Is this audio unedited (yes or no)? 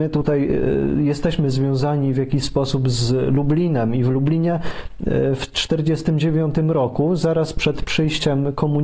yes